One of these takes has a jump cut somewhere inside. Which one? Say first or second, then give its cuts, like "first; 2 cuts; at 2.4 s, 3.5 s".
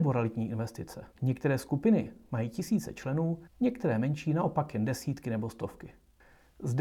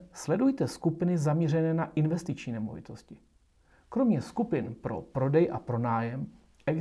first; 2 cuts; at 1.1 s, 3.5 s